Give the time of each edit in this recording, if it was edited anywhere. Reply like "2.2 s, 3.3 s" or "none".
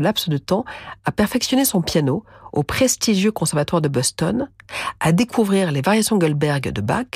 none